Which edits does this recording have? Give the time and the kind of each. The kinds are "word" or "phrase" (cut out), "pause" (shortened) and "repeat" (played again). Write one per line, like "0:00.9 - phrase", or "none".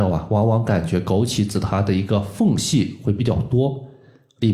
none